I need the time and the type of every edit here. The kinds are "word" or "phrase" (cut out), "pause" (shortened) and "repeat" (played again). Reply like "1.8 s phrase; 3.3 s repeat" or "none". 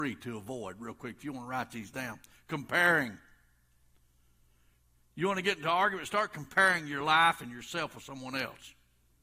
none

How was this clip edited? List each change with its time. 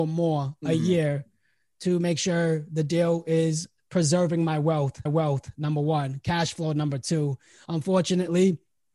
5.1 s repeat

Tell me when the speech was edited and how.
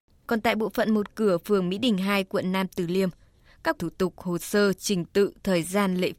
3.8 s phrase

